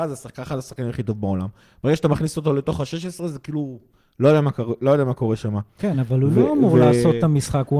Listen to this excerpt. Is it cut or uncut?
uncut